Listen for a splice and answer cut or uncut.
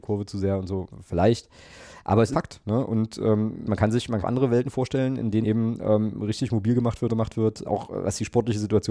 cut